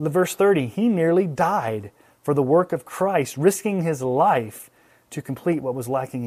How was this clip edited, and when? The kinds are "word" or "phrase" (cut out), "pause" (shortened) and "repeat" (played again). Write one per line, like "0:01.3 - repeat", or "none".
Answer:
none